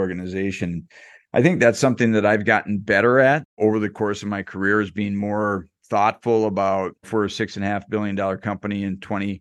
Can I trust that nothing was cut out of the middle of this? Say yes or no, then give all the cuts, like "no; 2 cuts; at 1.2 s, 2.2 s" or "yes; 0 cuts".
yes; 0 cuts